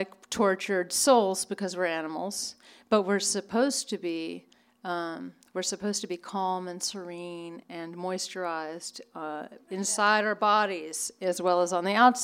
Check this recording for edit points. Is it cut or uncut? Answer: uncut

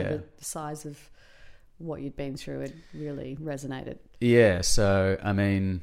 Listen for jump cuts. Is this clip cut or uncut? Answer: uncut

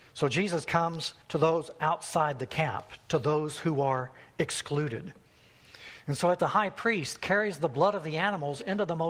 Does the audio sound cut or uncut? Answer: cut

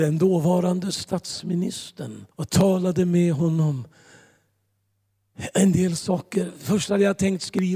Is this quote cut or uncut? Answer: cut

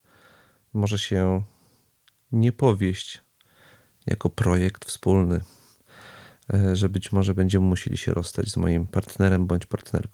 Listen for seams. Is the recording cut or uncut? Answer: uncut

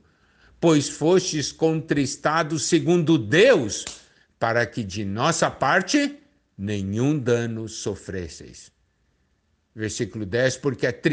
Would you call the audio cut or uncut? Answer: uncut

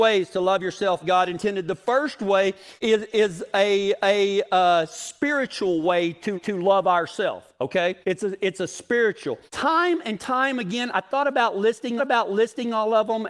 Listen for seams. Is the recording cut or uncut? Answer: cut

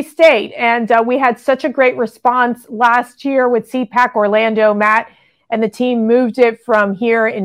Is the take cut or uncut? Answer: uncut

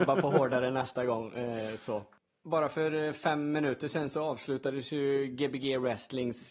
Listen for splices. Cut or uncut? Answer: uncut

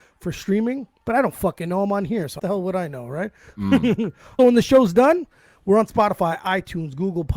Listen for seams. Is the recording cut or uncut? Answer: cut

